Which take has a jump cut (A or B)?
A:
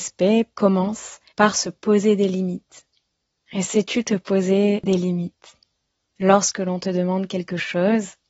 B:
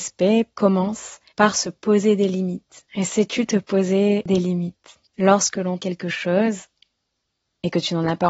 B